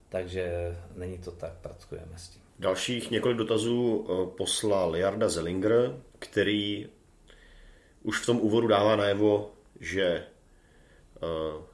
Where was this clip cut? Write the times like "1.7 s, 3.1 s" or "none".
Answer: 2.5 s, 6.1 s